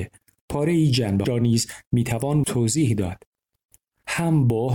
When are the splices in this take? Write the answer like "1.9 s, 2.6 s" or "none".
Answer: 1.2 s, 2.4 s